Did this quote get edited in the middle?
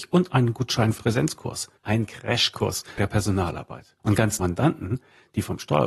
yes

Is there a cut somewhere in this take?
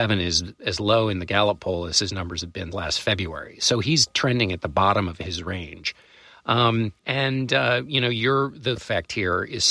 yes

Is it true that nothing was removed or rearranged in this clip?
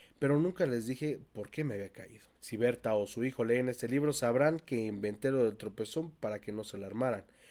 no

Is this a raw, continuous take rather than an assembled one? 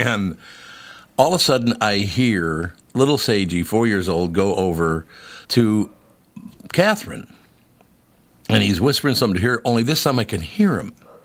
no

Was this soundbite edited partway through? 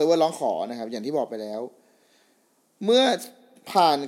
no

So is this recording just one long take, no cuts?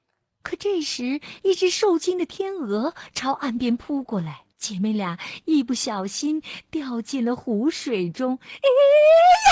no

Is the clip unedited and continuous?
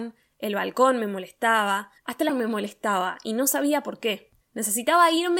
no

